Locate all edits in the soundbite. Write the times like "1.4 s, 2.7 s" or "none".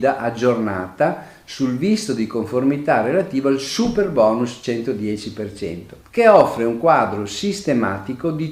6.0 s